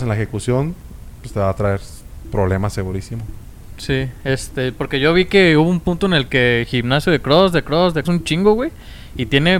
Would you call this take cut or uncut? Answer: cut